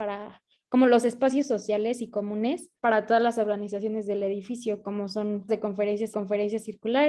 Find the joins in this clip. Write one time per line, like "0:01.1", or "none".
0:02.8
0:05.5
0:06.1

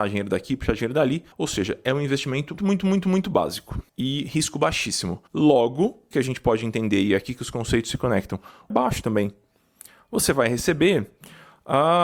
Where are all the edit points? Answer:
0:01.3
0:02.6
0:03.9
0:05.3
0:06.1
0:08.7

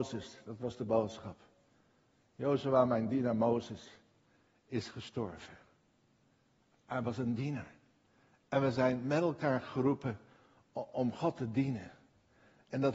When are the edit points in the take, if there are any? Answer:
none

